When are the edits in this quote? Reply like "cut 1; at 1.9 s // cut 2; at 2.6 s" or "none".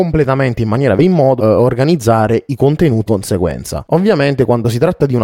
cut 1; at 1.0 s // cut 2; at 1.4 s // cut 3; at 3.1 s